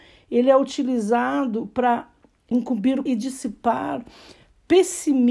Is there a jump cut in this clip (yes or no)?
yes